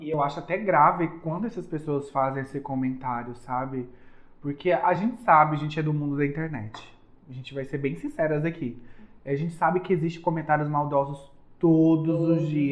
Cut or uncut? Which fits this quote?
uncut